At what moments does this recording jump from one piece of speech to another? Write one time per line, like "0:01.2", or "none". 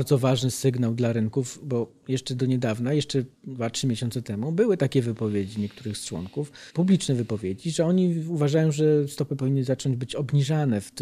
0:03.4
0:06.7